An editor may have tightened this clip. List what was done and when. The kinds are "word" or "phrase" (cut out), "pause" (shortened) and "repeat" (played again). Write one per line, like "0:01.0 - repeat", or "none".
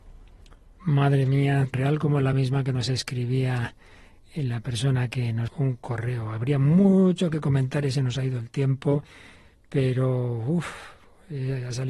0:01.7 - word
0:02.3 - word
0:05.5 - word